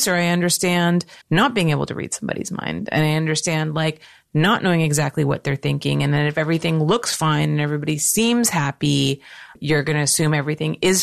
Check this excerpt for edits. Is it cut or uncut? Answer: cut